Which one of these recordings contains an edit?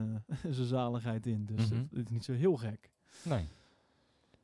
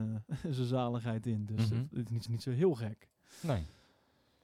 second; 1 cut; at 2.3 s

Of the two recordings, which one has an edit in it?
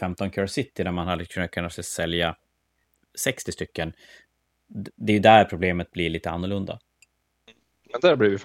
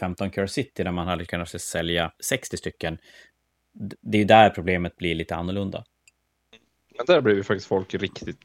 second; 2 cuts; at 1.3 s, 2.1 s

